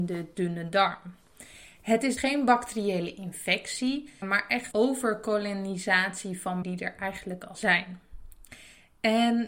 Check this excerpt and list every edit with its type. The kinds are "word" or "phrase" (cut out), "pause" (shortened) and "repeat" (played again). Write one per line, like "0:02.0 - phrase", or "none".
0:02.2 - word
0:04.2 - word
0:04.7 - word
0:06.6 - word
0:07.5 - word